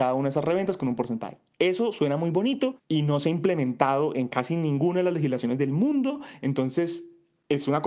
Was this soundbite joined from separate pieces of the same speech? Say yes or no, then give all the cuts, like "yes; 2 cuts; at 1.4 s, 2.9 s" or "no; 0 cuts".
no; 0 cuts